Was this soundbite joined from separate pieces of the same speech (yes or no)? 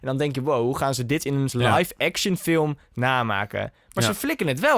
yes